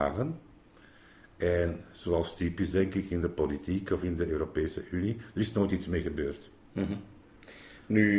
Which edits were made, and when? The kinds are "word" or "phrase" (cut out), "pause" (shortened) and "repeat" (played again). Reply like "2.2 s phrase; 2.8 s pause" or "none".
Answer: none